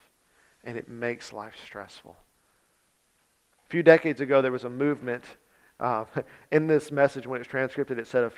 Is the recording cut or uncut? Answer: uncut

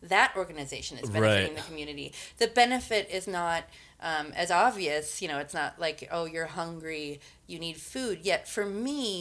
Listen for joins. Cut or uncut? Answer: uncut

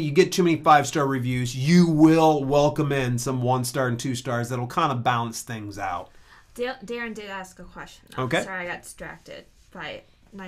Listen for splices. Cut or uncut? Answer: uncut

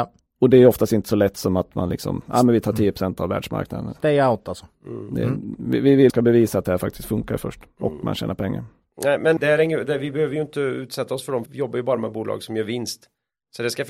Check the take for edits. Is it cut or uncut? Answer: cut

